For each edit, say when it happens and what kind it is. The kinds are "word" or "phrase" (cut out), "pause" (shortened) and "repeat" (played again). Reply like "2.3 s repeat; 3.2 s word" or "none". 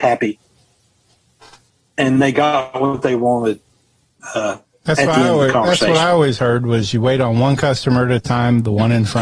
none

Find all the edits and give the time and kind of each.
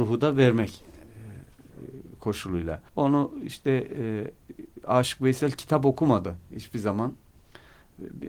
2.9 s pause

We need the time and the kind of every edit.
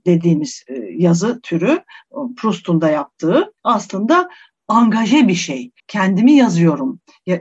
3.6 s pause; 5.8 s pause

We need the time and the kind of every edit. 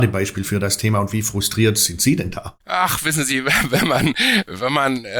2.6 s pause

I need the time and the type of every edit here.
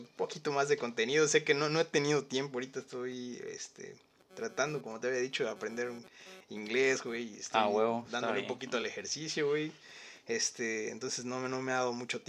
none

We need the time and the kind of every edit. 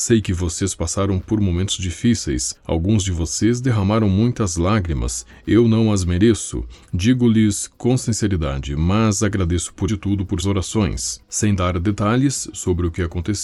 9.9 s phrase; 10.4 s word; 11.2 s pause

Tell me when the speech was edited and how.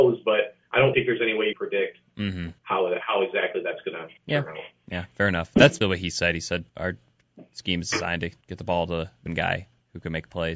0.9 s word; 1.5 s phrase; 2.6 s pause; 4.2 s pause; 5.8 s word; 6.7 s pause; 8.4 s pause; 9.3 s word

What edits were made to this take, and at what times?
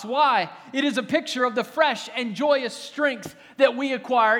none

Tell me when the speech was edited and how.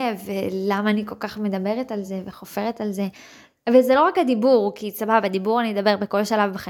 none

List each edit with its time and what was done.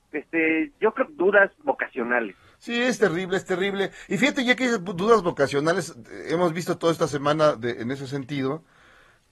1.1 s phrase

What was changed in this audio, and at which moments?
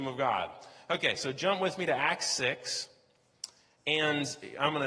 none

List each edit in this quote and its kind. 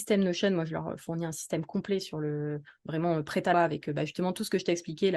3.5 s word

